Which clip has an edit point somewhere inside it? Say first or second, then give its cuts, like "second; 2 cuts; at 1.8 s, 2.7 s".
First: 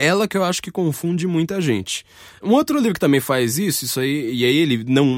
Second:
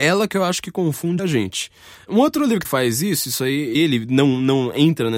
second; 3 cuts; at 1.2 s, 2.6 s, 3.7 s